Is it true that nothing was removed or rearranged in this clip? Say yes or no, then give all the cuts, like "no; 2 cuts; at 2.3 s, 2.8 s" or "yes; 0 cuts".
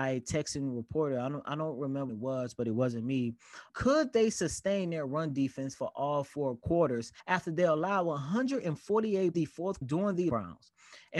no; 5 cuts; at 2.1 s, 7.2 s, 9.3 s, 9.8 s, 10.3 s